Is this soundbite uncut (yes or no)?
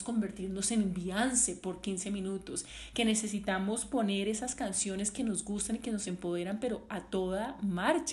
yes